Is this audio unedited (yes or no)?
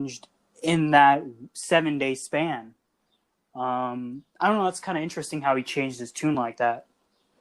yes